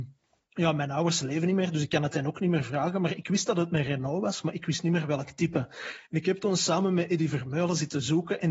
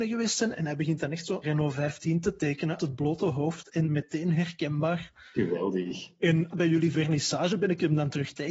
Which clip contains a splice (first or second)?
second